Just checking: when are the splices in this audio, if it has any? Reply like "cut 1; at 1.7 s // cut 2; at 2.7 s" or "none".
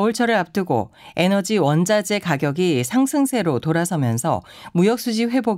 none